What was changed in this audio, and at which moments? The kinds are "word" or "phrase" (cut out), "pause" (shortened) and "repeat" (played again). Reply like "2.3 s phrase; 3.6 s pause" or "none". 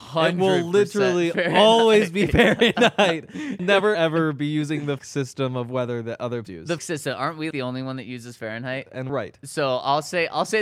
3.6 s word; 3.9 s word; 5.0 s word; 6.5 s word; 6.8 s word; 7.5 s word; 9.1 s word